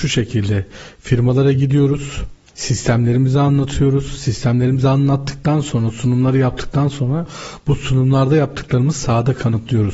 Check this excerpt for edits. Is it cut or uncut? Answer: uncut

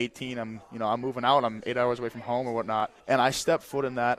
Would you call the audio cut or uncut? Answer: cut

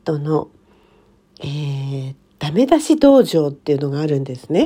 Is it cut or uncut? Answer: cut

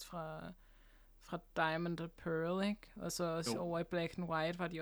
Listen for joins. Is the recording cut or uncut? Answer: uncut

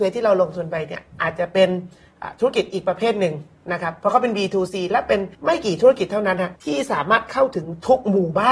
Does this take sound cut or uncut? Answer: cut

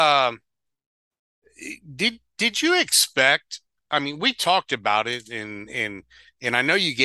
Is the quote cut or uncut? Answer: uncut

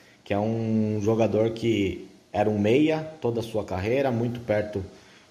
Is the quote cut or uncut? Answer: uncut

